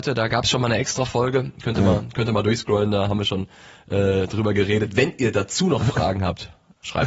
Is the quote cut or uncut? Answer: uncut